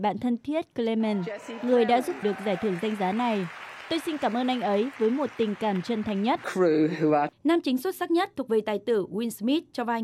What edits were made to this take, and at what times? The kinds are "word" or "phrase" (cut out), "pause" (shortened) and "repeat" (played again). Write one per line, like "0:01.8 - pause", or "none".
0:02.2 - phrase
0:07.3 - pause